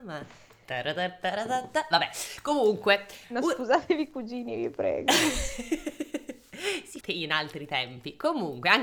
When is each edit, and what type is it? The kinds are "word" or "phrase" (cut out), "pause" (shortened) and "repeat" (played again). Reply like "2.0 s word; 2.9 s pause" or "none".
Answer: 3.2 s pause; 7.0 s word